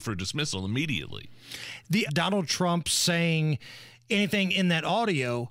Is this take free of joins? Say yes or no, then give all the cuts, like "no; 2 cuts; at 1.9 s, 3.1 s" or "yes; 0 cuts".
no; 1 cut; at 2.1 s